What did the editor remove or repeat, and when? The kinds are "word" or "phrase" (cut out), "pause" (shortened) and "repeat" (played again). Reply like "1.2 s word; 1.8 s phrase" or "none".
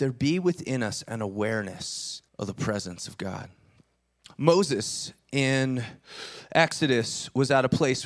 2.3 s pause; 4.0 s pause